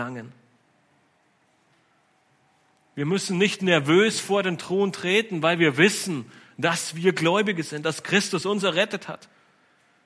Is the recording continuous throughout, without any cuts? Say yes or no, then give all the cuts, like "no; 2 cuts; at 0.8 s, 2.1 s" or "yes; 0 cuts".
yes; 0 cuts